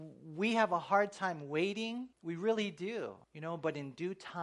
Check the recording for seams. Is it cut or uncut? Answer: cut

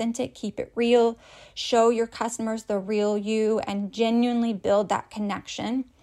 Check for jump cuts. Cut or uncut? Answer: uncut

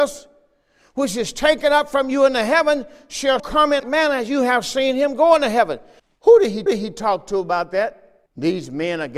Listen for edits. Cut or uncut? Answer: cut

